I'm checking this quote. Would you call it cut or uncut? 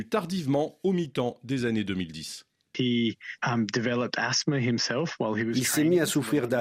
uncut